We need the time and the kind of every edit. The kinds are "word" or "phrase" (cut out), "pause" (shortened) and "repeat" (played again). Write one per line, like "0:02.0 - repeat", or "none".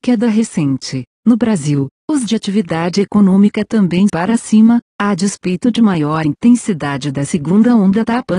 0:02.3 - word
0:04.1 - word

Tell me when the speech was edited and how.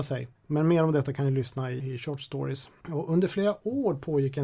0:01.8 - word

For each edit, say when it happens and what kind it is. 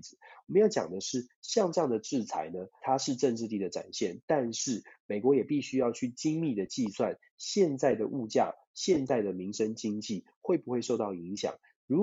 0:02.8 - phrase

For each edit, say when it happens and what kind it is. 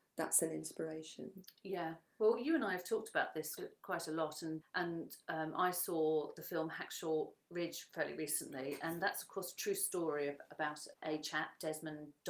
0:03.6 - word
0:04.6 - word
0:10.9 - word

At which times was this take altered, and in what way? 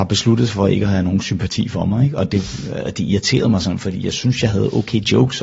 none

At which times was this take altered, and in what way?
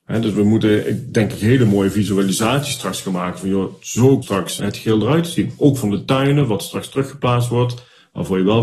0:04.2 - word
0:04.6 - word

